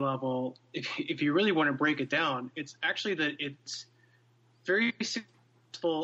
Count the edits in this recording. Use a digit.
0